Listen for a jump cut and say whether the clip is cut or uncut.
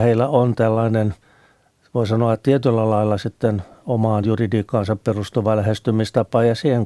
uncut